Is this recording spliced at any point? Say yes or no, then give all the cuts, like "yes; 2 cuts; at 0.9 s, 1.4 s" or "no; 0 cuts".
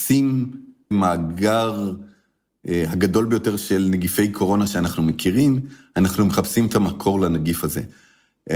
yes; 1 cut; at 0.9 s